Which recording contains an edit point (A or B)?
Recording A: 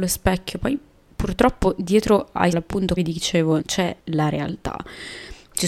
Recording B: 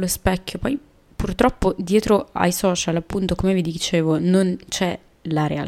A